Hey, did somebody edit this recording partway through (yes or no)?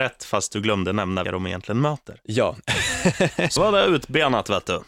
yes